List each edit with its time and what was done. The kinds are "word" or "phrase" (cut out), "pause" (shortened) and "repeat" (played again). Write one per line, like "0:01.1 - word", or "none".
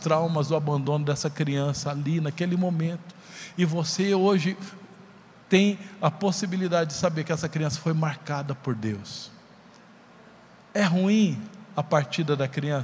none